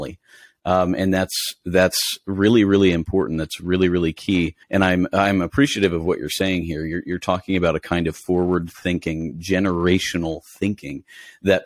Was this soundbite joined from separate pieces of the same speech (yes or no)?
yes